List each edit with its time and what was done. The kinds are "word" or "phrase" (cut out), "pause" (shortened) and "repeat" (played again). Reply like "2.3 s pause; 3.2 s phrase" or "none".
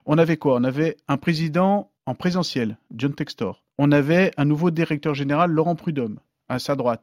2.0 s pause; 3.7 s pause